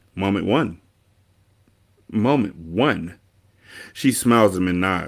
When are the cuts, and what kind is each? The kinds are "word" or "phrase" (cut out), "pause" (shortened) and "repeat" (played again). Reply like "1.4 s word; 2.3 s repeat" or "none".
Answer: none